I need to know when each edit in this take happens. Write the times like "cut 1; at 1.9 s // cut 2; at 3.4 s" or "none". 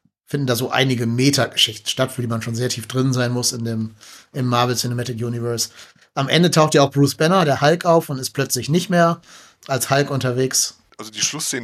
none